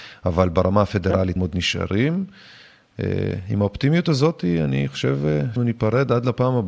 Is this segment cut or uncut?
cut